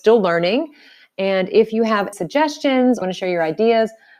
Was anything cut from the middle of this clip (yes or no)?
yes